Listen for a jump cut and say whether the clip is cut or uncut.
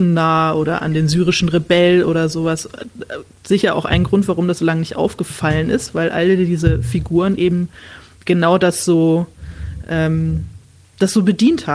uncut